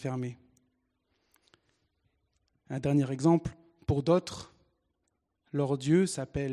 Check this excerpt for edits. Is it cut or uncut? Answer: uncut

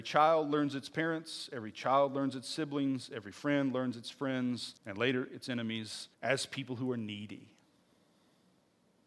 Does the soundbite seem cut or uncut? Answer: cut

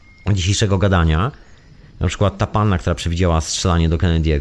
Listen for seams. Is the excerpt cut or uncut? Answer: uncut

